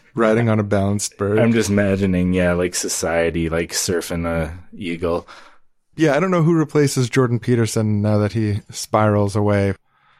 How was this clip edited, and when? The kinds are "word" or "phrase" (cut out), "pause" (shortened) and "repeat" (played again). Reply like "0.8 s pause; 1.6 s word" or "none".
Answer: none